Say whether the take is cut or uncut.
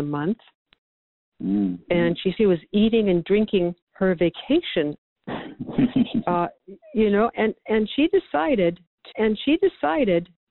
cut